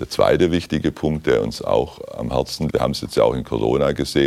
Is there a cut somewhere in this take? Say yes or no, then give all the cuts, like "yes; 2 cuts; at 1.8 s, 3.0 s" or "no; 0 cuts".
yes; 1 cut; at 2.7 s